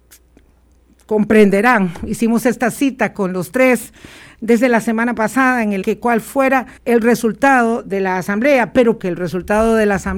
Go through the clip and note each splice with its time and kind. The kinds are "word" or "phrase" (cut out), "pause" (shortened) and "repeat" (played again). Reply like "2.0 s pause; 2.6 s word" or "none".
5.8 s phrase; 6.8 s pause; 9.0 s word